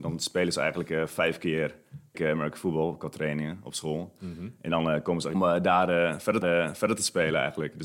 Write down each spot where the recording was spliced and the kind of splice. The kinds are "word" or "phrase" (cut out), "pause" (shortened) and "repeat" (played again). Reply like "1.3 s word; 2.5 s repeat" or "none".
2.1 s word; 5.3 s phrase; 6.4 s repeat